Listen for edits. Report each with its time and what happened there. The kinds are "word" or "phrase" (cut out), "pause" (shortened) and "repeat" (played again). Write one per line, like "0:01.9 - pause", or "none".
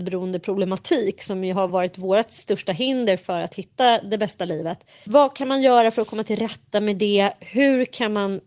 none

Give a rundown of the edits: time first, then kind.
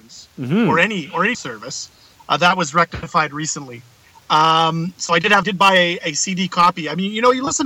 0:01.3 - word
0:05.4 - word

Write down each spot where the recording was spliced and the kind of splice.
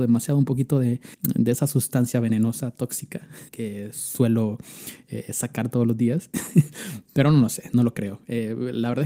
0:01.1 - pause
0:03.5 - pause

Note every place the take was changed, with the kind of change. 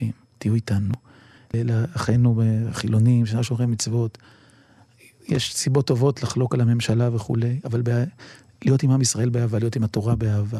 none

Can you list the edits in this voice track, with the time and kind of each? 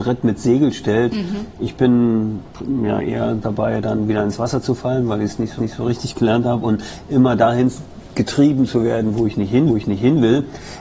0:05.6 - repeat
0:09.7 - repeat

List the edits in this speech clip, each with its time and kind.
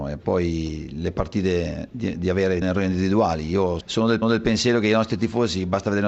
0:02.6 - phrase
0:03.8 - word
0:04.2 - repeat

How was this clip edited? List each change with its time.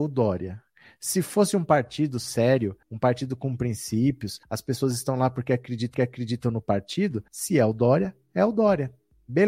0:02.8 - pause
0:04.4 - pause
0:05.9 - repeat
0:07.3 - pause

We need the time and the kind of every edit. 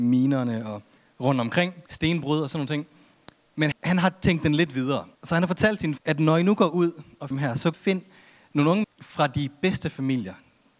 0:01.0 - pause
0:01.8 - pause
0:03.7 - word
0:05.1 - pause
0:06.0 - word
0:07.3 - word
0:07.7 - phrase
0:08.8 - word

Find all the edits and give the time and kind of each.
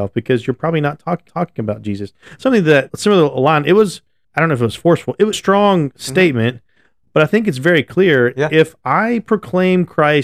0:01.3 - repeat
0:02.9 - word
0:04.2 - pause
0:05.3 - phrase

